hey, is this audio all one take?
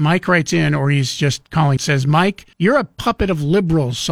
no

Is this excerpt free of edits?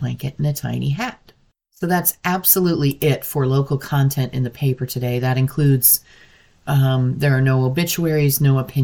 yes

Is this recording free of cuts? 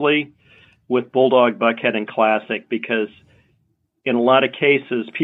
yes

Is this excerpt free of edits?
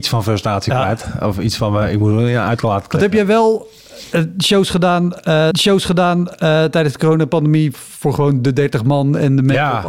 no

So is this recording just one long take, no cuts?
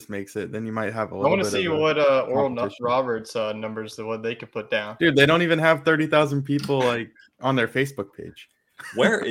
yes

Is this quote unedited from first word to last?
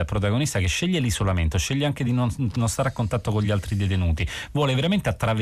yes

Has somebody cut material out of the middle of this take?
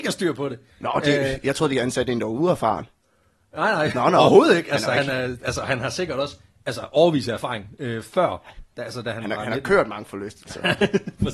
no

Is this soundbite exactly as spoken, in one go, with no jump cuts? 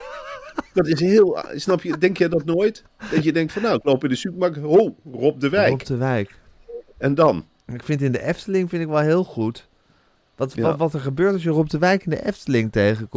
no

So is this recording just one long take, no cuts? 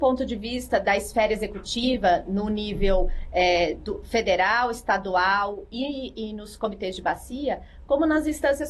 yes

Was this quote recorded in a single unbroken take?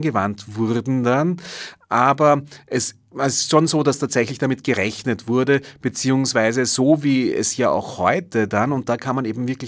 yes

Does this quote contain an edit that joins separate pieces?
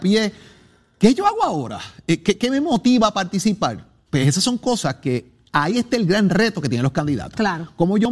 no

